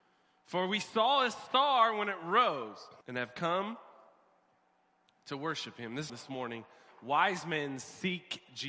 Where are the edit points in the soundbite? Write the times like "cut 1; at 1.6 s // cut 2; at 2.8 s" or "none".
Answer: cut 1; at 3.0 s // cut 2; at 6.1 s

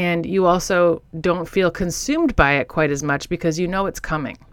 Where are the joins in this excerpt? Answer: cut 1; at 1.1 s

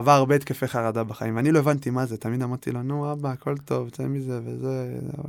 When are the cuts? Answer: none

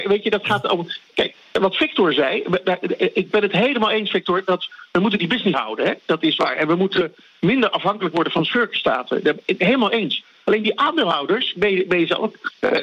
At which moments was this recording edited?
cut 1; at 5.5 s

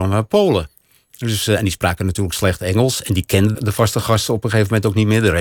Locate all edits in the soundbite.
cut 1; at 3.5 s

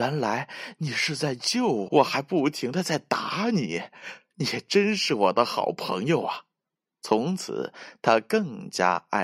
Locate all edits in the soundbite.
cut 1; at 1.9 s // cut 2; at 6.8 s

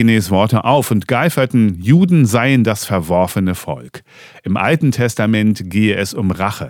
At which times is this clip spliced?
none

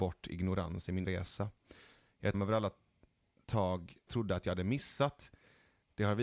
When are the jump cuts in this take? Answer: cut 1; at 1.0 s // cut 2; at 2.3 s // cut 3; at 4.1 s

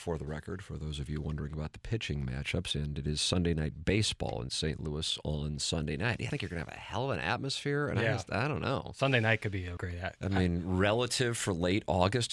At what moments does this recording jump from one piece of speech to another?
cut 1; at 6.3 s // cut 2; at 9.8 s

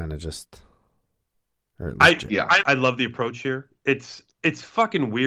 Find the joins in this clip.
cut 1; at 2.6 s

